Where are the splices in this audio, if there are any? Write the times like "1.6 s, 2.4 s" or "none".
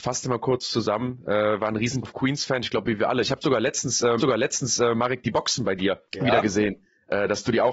2.0 s, 4.2 s, 6.1 s